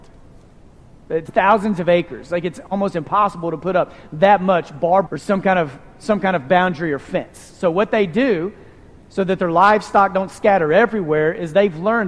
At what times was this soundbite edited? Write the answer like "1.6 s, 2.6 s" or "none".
1.3 s, 5.1 s

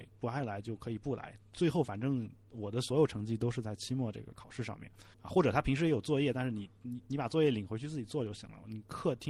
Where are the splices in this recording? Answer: 5.1 s

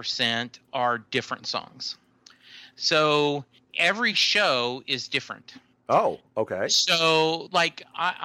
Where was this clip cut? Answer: none

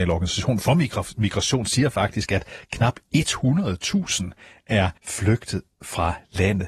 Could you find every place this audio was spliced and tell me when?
5.0 s

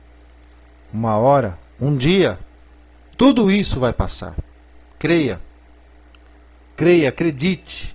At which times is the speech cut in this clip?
none

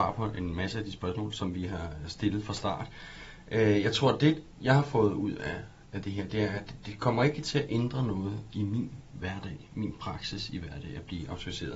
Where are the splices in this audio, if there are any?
none

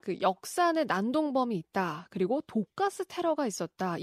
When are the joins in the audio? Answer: none

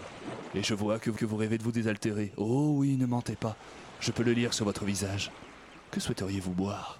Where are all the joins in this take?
1.2 s

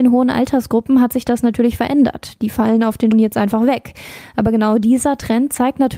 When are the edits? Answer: 3.1 s

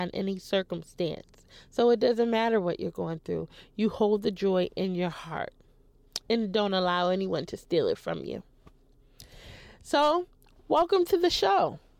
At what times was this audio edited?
none

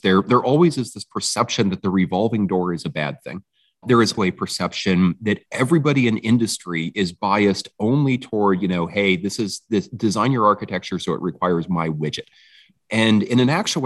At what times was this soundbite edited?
3.8 s, 4.2 s, 12.8 s

